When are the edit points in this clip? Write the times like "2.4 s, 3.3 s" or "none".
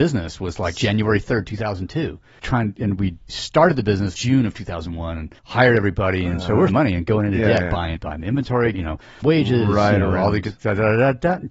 2.4 s, 3.3 s, 4.1 s, 5.4 s, 6.7 s, 8.0 s, 8.7 s, 9.2 s